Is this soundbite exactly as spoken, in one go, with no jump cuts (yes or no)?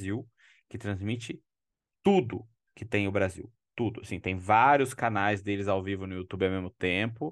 yes